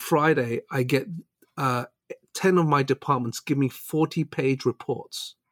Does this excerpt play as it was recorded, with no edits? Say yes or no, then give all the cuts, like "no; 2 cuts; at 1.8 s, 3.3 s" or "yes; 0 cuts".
yes; 0 cuts